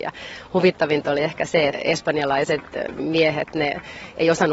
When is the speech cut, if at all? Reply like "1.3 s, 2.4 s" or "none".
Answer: 1.7 s